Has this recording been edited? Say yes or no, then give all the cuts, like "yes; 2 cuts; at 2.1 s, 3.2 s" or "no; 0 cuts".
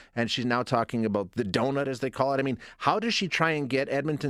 no; 0 cuts